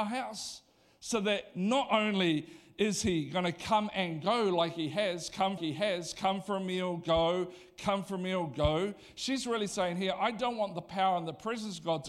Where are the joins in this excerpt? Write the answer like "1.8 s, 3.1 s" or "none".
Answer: 5.6 s